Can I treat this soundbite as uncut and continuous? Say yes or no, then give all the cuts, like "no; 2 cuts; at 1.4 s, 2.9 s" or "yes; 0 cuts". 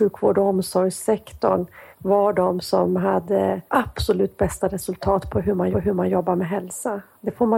no; 3 cuts; at 1.9 s, 3.7 s, 5.7 s